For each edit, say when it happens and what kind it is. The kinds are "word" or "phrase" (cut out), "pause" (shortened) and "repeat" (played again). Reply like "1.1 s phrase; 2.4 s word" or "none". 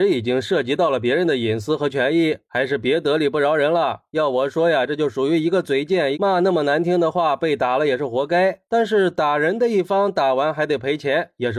6.1 s phrase